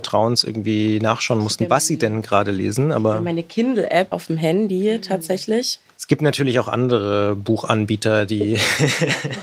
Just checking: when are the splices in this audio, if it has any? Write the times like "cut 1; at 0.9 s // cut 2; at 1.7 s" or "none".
cut 1; at 4.1 s